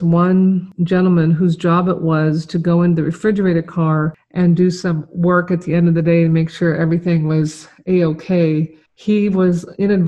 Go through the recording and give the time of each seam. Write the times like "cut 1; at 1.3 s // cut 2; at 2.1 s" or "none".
cut 1; at 8.9 s

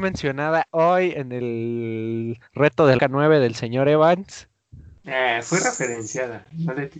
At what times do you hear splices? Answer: cut 1; at 2.5 s // cut 2; at 3.0 s

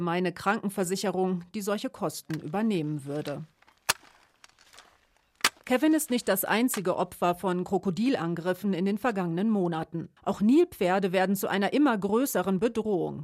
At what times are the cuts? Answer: cut 1; at 5.6 s // cut 2; at 10.2 s

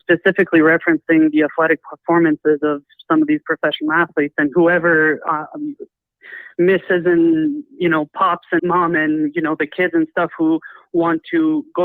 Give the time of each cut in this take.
cut 1; at 8.6 s

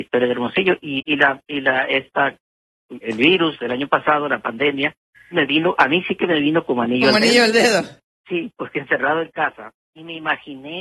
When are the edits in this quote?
cut 1; at 1.0 s // cut 2; at 3.0 s // cut 3; at 5.3 s

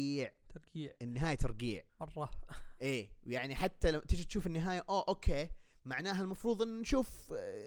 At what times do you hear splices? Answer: cut 1; at 1.9 s

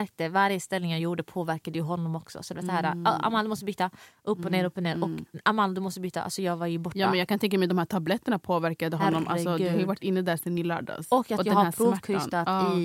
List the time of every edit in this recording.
none

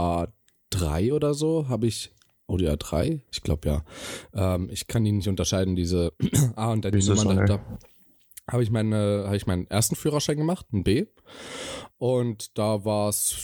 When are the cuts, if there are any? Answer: cut 1; at 3.3 s

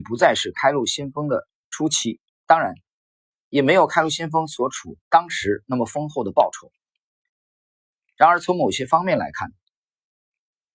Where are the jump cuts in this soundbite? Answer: cut 1; at 2.3 s // cut 2; at 5.0 s

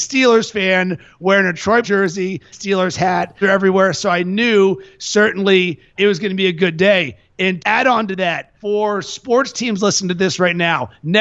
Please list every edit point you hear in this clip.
cut 1; at 1.8 s // cut 2; at 2.5 s // cut 3; at 3.4 s // cut 4; at 6.0 s // cut 5; at 7.6 s // cut 6; at 8.6 s

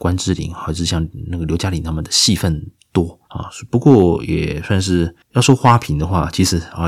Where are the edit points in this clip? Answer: cut 1; at 3.2 s // cut 2; at 5.2 s

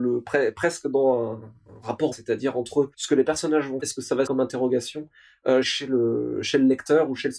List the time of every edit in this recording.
cut 1; at 2.1 s // cut 2; at 2.9 s // cut 3; at 3.8 s // cut 4; at 4.3 s // cut 5; at 5.6 s

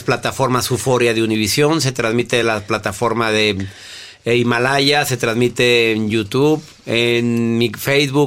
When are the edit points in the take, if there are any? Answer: none

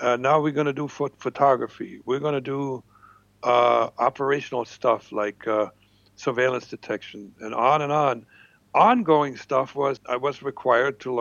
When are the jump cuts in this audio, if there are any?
cut 1; at 10.0 s

